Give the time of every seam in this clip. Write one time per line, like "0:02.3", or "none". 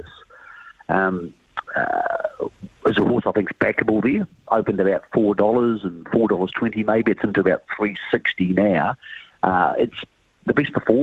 0:02.8